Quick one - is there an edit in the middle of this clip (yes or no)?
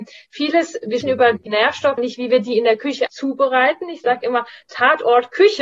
yes